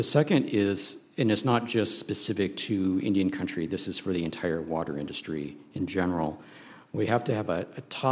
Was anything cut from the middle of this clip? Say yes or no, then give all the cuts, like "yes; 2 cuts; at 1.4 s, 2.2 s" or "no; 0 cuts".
no; 0 cuts